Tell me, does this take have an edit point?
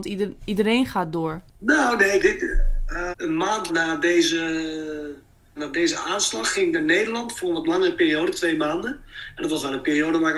yes; 4 cuts; at 2.2 s, 3.1 s, 3.7 s, 5.6 s

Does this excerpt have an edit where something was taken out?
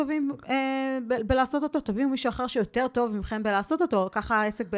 no; 0 cuts

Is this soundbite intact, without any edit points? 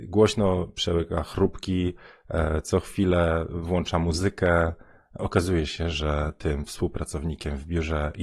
yes; 0 cuts

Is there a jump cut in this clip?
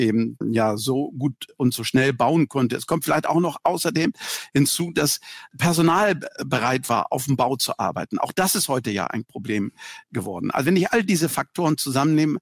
no; 0 cuts

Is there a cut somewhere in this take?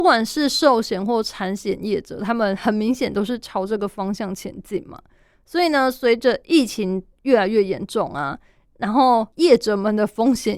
yes; 1 cut; at 9.3 s

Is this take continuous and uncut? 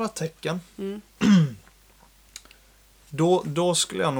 yes; 0 cuts

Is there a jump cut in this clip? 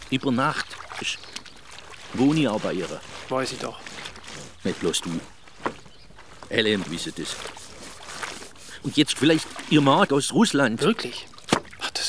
yes; 5 cuts; at 1.0 s, 2.2 s, 6.8 s, 9.2 s, 10.1 s

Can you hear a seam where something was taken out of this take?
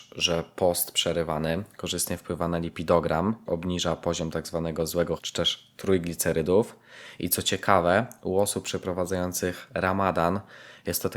yes; 2 cuts; at 3.5 s, 5.2 s

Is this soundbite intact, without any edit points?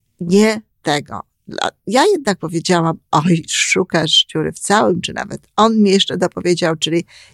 yes; 0 cuts

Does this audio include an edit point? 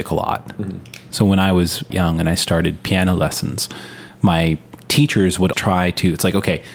yes; 2 cuts; at 1.9 s, 5.5 s

